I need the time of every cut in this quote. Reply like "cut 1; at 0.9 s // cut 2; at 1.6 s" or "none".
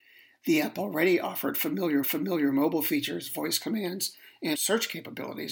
cut 1; at 2.0 s // cut 2; at 4.5 s